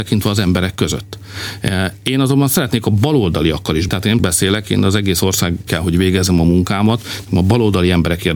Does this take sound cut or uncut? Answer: cut